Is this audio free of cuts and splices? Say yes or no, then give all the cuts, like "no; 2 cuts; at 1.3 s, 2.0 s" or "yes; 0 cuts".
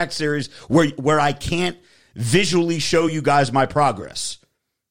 yes; 0 cuts